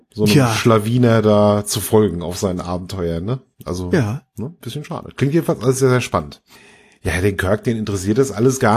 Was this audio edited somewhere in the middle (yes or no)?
no